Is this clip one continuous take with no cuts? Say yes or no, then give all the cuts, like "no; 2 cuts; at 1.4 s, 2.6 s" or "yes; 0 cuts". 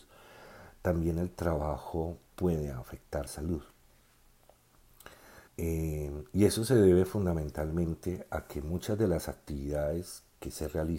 no; 2 cuts; at 3.3 s, 5.5 s